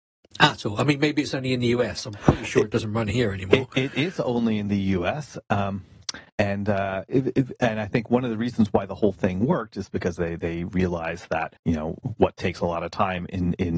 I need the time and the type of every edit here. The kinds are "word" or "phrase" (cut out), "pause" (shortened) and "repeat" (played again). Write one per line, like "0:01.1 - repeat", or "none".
0:06.3 - pause
0:11.6 - pause